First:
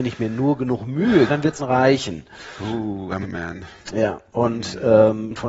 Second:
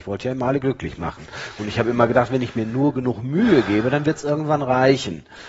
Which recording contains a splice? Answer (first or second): first